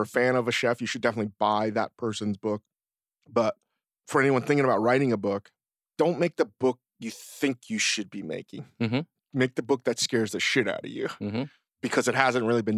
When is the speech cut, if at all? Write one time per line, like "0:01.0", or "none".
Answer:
none